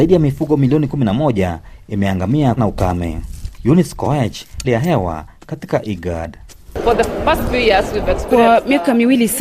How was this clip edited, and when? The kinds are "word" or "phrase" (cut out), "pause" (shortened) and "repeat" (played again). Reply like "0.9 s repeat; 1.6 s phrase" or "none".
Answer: 2.6 s word; 4.6 s phrase